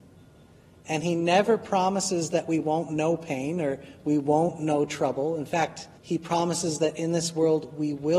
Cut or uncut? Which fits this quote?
cut